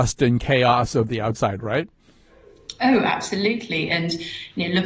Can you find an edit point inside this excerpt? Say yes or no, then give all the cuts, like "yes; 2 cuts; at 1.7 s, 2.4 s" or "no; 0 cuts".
yes; 1 cut; at 1.6 s